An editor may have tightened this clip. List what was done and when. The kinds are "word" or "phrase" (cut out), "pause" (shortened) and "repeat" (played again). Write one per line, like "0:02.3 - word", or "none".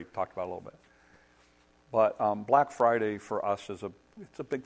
none